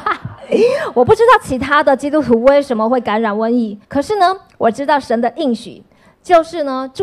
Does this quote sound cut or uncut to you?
cut